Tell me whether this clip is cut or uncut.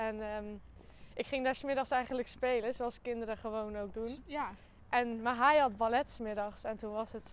uncut